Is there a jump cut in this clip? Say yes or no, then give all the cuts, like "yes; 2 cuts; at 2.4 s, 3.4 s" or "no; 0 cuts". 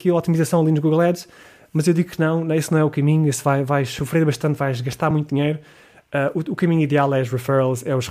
no; 0 cuts